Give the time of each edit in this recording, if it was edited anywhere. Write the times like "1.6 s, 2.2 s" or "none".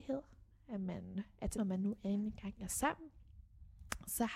1.5 s